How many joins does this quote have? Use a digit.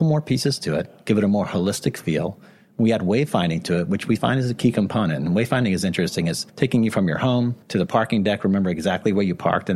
2